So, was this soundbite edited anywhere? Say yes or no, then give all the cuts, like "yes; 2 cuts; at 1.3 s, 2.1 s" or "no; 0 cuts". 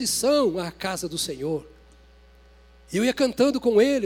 no; 0 cuts